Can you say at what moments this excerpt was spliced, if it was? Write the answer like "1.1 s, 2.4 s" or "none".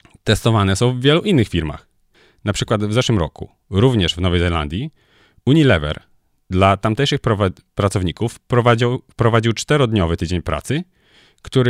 none